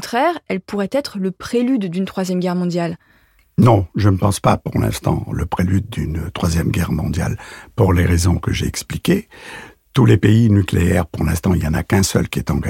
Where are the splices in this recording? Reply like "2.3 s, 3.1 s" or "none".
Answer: none